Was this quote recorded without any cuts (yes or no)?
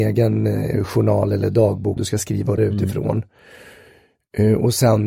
no